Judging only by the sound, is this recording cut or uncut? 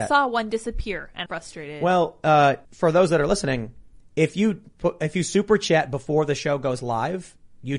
cut